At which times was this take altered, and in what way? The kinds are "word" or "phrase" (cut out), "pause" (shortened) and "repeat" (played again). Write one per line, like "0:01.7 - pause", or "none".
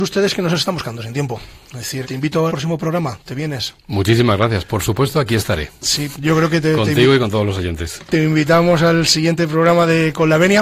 0:02.0 - word
0:02.5 - word
0:06.1 - word